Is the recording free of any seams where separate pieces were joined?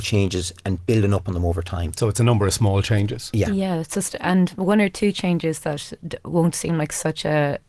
yes; 0 cuts

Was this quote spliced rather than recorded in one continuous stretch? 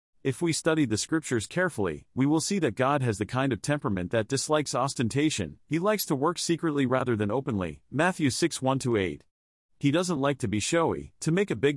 no; 0 cuts

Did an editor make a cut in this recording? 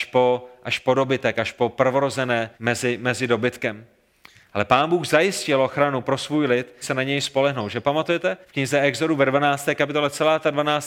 yes; 3 cuts; at 2.5 s, 6.8 s, 8.4 s

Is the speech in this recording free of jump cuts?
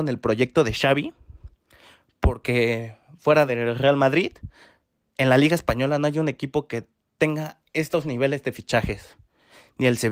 yes; 0 cuts

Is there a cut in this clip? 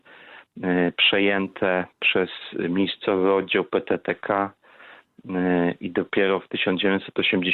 no; 0 cuts

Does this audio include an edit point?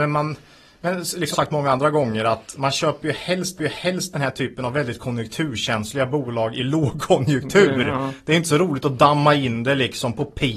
yes; 2 cuts; at 1.3 s, 3.6 s

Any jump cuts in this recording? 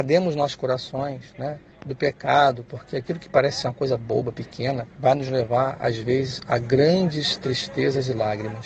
yes; 2 cuts; at 1.7 s, 4.9 s

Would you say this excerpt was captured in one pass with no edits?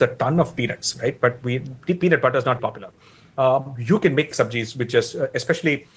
no; 2 cuts; at 2.6 s, 4.3 s

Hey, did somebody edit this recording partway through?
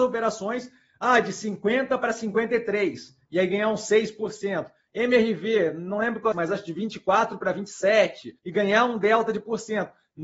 yes; 2 cuts; at 6.3 s, 8.4 s

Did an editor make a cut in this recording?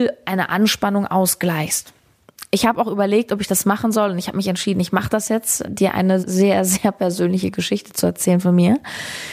yes; 2 cuts; at 5.6 s, 6.2 s

